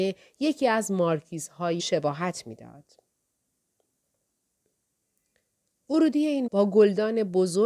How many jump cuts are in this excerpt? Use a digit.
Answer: 2